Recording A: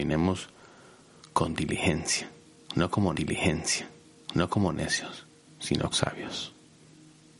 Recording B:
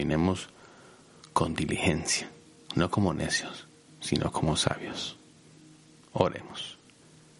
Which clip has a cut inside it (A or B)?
A